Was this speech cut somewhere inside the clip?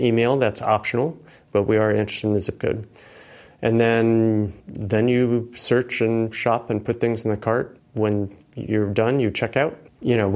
yes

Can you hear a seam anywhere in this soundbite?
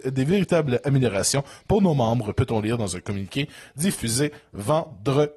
no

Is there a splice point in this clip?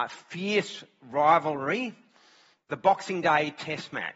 no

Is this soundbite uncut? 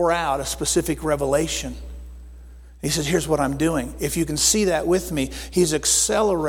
yes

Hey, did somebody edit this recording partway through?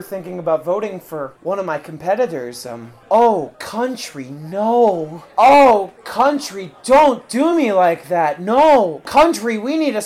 no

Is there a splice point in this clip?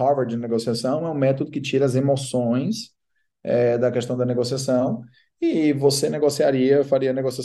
no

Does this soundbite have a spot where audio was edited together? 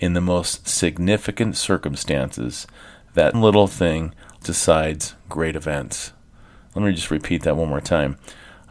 yes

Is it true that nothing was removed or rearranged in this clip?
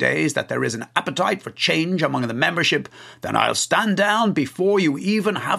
yes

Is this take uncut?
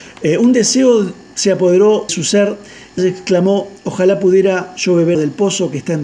no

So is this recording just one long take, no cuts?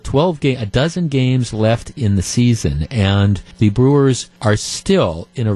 no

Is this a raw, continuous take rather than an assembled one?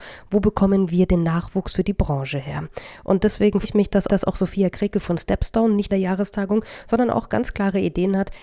no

